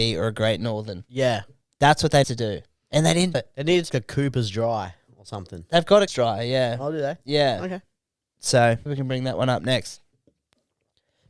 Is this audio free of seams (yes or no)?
no